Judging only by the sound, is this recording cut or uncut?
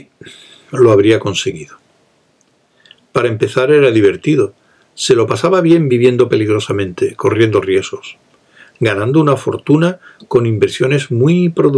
uncut